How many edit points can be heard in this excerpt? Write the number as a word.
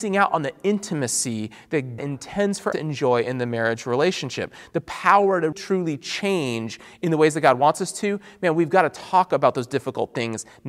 three